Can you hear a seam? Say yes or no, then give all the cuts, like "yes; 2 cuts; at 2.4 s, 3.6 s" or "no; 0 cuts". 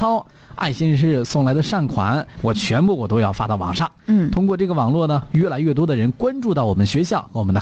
yes; 1 cut; at 2.3 s